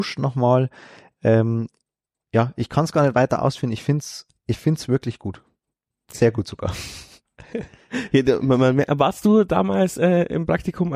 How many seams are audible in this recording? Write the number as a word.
zero